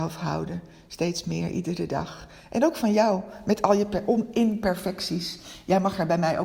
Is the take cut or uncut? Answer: uncut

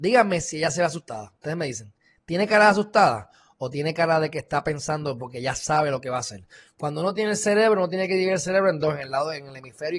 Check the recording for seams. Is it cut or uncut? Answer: uncut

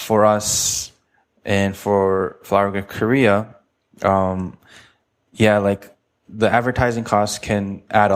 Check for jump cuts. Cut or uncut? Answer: uncut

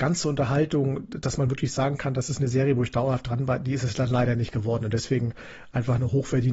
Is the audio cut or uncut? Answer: uncut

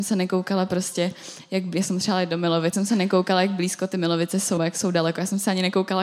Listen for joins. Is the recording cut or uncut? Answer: cut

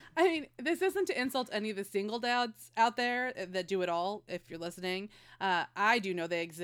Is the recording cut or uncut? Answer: uncut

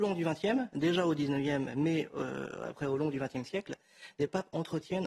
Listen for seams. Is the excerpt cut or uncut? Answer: uncut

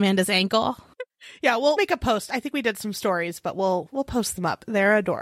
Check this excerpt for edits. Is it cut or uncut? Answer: uncut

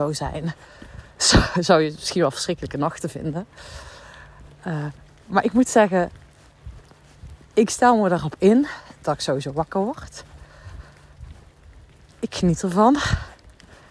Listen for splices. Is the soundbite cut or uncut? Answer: uncut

